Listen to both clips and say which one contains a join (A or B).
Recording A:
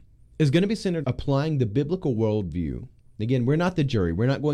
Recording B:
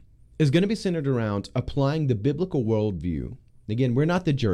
A